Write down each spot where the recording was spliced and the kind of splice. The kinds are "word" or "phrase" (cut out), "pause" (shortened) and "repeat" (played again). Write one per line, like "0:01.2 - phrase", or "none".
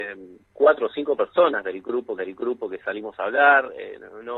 0:02.2 - repeat